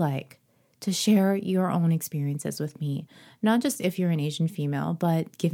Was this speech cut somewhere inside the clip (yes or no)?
no